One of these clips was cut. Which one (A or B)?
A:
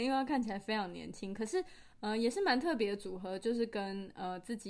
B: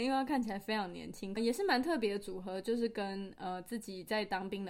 B